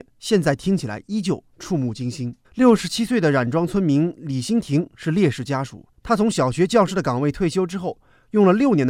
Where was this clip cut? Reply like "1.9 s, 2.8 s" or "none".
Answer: 2.4 s, 5.9 s